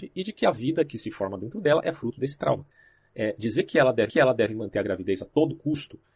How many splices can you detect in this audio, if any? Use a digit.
1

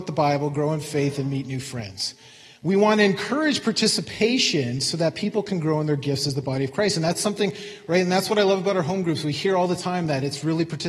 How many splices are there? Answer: 0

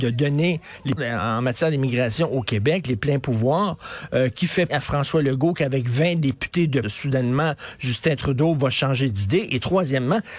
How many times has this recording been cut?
4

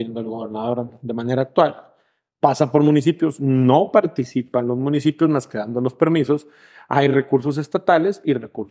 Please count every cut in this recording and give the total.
0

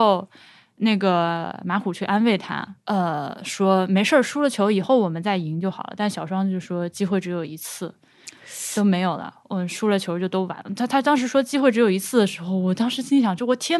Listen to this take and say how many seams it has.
1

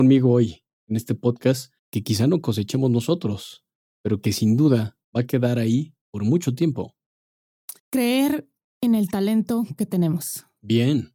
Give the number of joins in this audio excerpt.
4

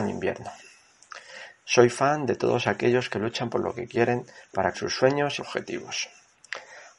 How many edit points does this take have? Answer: 2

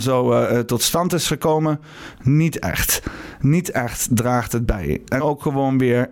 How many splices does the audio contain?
1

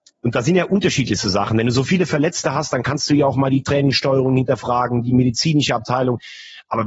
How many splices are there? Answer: 0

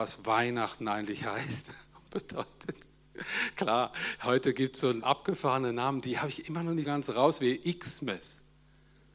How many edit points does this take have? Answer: 2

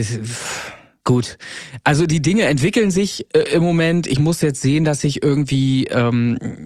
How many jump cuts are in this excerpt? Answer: 0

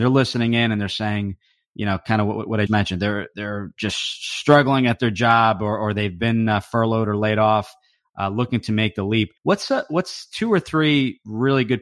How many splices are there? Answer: 2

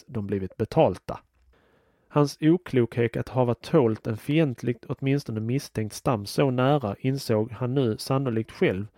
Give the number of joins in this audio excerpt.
0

